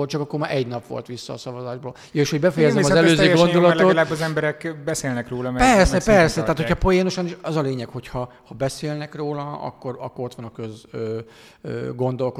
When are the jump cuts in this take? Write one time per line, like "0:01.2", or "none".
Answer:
none